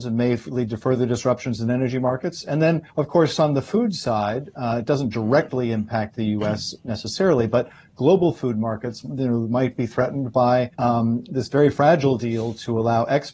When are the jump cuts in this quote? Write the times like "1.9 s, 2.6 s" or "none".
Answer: 2.9 s, 10.7 s